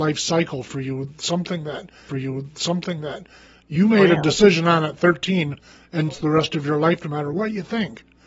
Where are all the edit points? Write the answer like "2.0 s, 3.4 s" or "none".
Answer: 2.1 s, 6.1 s

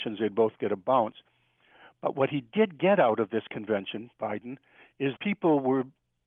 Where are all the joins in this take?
5.2 s

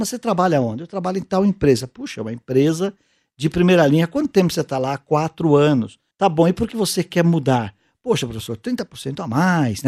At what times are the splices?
6.1 s, 6.7 s

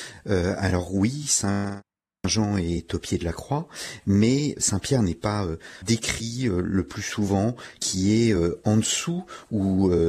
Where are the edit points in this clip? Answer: 5.8 s

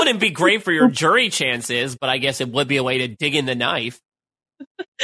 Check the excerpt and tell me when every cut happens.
none

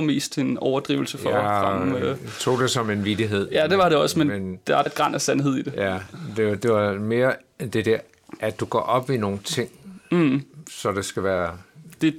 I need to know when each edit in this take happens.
4.9 s

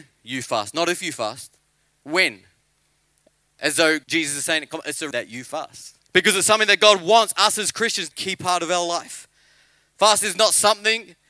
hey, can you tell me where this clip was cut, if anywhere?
4.0 s, 5.1 s, 6.0 s, 8.1 s

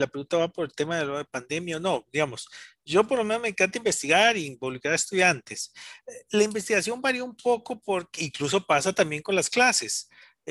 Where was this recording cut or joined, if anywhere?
8.2 s

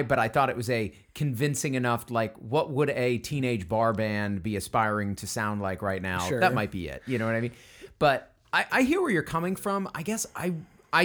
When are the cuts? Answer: none

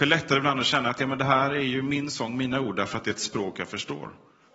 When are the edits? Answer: none

